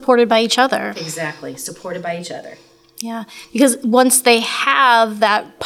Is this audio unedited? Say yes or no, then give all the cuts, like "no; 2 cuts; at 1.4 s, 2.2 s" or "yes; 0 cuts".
yes; 0 cuts